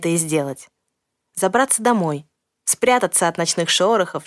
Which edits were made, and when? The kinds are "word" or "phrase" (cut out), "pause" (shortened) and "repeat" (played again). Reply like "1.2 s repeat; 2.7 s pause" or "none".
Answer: none